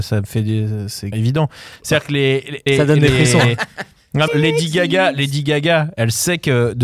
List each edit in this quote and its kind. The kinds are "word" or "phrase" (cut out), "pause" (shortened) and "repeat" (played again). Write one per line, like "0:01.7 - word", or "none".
0:01.1 - word
0:02.7 - word
0:04.3 - phrase